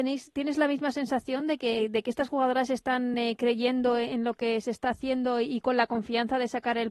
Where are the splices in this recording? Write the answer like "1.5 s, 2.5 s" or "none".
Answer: none